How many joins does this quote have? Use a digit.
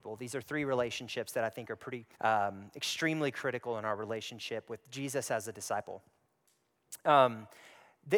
1